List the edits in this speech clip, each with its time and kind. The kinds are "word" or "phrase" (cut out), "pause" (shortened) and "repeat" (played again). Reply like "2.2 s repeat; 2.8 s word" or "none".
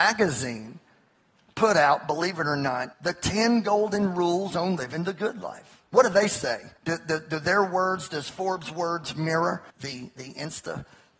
2.9 s pause; 5.9 s pause; 6.8 s pause; 9.7 s pause